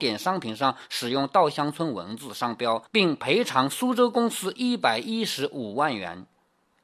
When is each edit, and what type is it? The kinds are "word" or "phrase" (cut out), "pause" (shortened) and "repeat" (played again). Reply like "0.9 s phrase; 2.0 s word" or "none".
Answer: 2.9 s pause